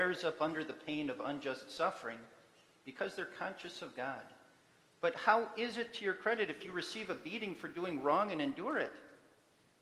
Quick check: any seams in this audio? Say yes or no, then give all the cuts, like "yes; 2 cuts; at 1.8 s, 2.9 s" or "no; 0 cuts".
no; 0 cuts